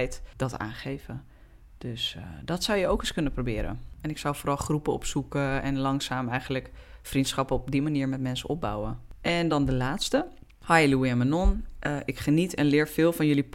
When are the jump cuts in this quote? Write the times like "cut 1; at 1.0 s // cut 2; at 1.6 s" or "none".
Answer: none